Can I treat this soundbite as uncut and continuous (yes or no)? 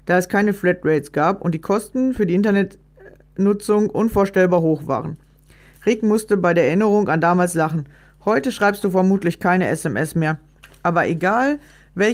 yes